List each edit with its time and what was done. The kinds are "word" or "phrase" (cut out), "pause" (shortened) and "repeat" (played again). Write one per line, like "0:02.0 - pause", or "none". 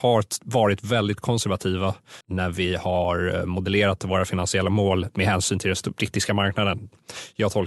0:02.2 - pause